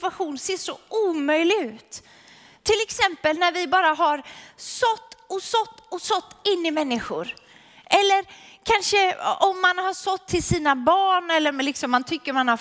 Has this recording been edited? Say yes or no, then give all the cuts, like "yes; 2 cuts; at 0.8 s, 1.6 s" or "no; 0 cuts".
no; 0 cuts